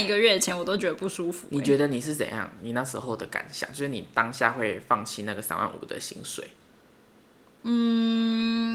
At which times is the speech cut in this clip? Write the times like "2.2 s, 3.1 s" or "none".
none